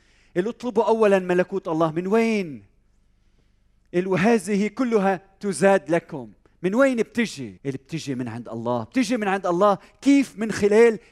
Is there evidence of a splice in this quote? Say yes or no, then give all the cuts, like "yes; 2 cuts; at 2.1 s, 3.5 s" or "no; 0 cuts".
yes; 1 cut; at 7.6 s